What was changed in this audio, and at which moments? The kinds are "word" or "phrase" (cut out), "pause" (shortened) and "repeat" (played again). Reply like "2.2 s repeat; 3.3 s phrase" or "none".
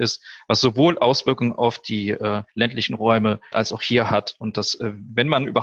2.5 s pause; 3.5 s word